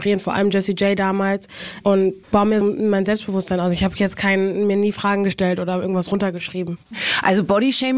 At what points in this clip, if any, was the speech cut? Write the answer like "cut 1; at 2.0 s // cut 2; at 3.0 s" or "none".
cut 1; at 2.2 s // cut 2; at 2.6 s